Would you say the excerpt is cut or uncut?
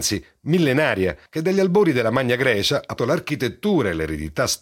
cut